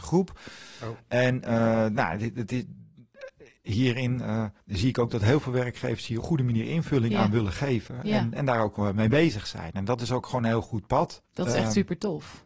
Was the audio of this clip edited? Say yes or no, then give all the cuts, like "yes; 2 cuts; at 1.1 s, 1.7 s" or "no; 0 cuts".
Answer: yes; 3 cuts; at 4.6 s, 6.2 s, 11.3 s